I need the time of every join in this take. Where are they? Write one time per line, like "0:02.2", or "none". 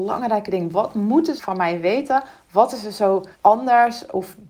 0:01.4
0:03.3